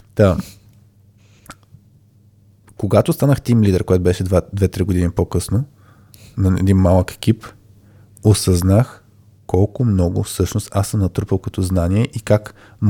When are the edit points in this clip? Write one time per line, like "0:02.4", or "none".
none